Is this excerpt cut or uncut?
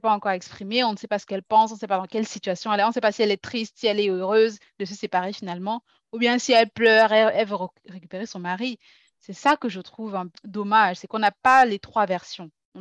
cut